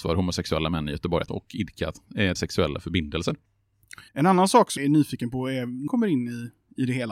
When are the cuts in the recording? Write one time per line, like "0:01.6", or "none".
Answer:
0:01.3
0:02.3
0:04.1
0:04.8
0:05.9